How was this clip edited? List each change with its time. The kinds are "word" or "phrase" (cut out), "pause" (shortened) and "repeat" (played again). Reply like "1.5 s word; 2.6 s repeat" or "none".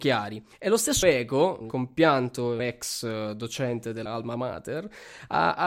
1.0 s word; 1.6 s word; 2.6 s word; 4.1 s word